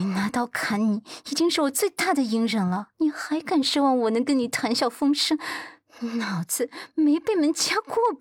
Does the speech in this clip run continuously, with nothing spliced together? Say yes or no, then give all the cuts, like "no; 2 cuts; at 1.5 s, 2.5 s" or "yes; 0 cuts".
no; 1 cut; at 2.9 s